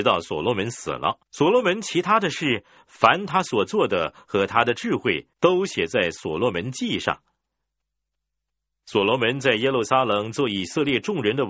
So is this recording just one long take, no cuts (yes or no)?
no